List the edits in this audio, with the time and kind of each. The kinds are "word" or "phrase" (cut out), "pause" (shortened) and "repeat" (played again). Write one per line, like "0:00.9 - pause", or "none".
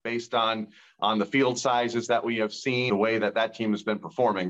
0:02.9 - word